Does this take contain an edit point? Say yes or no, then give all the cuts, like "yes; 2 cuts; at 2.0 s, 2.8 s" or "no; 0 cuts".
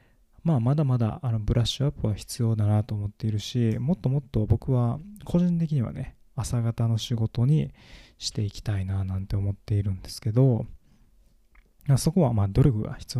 no; 0 cuts